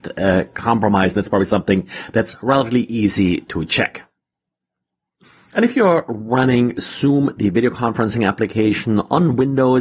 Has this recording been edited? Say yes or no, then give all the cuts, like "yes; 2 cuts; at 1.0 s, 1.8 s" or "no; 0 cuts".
no; 0 cuts